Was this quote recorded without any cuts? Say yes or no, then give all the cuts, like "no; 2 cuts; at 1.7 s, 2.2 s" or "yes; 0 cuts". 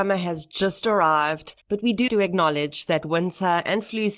no; 2 cuts; at 1.6 s, 2.1 s